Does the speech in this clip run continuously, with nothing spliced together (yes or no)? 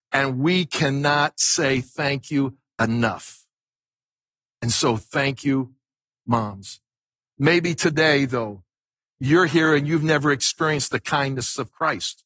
yes